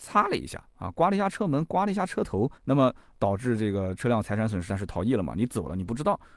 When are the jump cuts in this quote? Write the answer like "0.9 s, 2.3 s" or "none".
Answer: 2.6 s, 4.7 s